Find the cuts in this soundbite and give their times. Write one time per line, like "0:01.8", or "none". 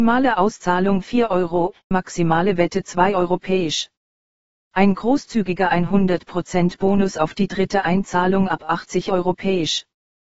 0:01.9